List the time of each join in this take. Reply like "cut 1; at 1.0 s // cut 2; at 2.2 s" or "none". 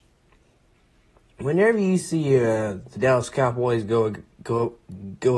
none